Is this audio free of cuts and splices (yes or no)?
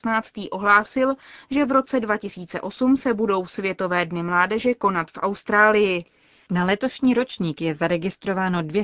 yes